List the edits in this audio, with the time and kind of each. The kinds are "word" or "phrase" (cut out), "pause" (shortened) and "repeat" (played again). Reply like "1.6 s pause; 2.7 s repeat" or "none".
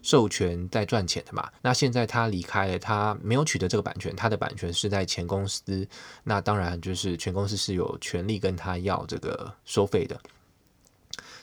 1.6 s pause; 9.6 s pause

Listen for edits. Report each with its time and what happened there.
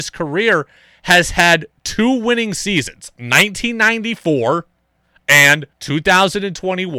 5.7 s pause

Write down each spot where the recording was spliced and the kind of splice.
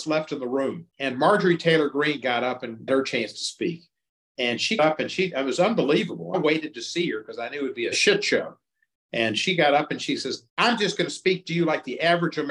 0.9 s pause; 2.9 s word; 4.8 s word; 10.5 s pause

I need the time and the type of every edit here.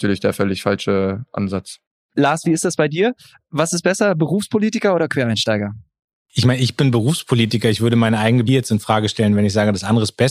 8.5 s word

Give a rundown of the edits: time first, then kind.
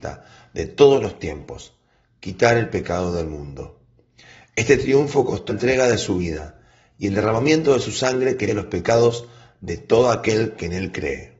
5.5 s word; 8.5 s word

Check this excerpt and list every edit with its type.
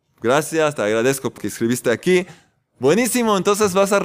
1.4 s word

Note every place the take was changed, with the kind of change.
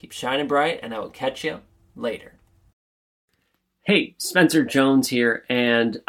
none

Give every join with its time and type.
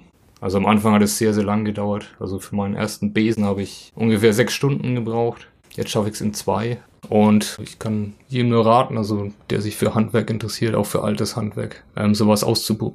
6.9 s pause; 11.9 s pause

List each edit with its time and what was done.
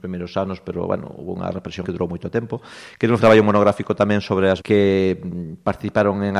1.8 s word; 3.2 s word; 4.6 s word

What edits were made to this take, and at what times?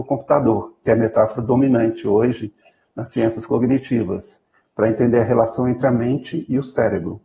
none

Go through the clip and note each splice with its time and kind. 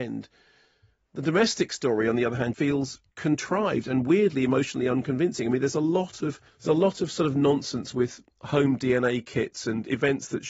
2.5 s word; 3.1 s pause; 6.5 s pause

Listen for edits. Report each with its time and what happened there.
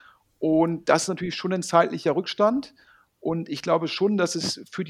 none

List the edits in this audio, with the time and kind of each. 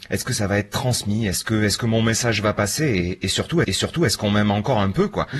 3.6 s repeat

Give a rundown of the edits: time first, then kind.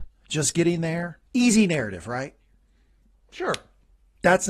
1.3 s pause

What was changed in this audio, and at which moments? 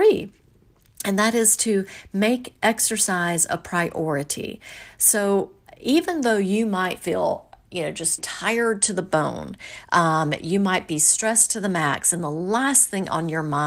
5.7 s pause; 8.2 s word

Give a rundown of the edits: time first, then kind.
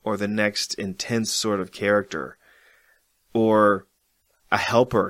none

